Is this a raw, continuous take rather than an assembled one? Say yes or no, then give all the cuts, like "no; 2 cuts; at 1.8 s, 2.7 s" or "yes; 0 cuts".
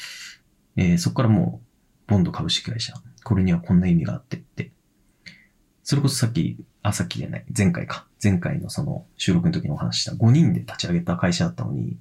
yes; 0 cuts